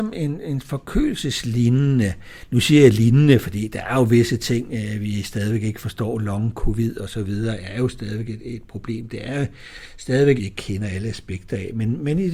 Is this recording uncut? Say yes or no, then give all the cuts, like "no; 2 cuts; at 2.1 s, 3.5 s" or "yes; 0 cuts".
no; 1 cut; at 10.4 s